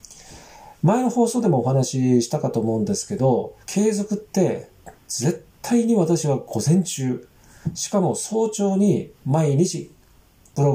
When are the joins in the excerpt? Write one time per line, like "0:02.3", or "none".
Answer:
0:03.6
0:05.5
0:09.1